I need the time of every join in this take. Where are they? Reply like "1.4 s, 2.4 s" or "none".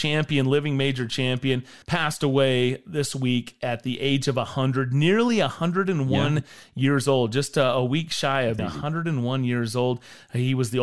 1.8 s, 8.6 s